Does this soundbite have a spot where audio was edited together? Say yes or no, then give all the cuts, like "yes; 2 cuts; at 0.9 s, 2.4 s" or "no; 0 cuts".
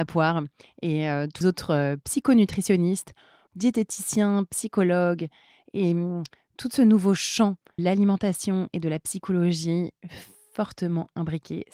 yes; 3 cuts; at 1.4 s, 3.5 s, 7.8 s